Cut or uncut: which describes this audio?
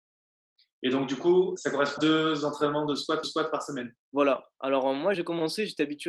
cut